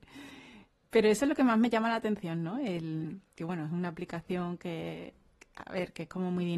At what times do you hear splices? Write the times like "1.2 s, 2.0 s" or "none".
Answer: none